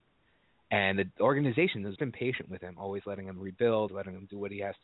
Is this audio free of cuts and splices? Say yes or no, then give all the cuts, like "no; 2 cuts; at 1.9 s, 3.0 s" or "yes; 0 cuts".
no; 2 cuts; at 2.0 s, 3.9 s